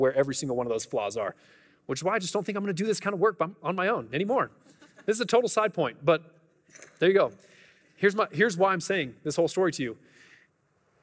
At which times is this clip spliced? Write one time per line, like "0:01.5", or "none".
none